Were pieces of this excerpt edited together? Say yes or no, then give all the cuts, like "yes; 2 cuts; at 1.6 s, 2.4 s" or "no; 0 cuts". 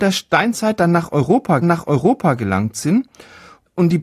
yes; 1 cut; at 1.6 s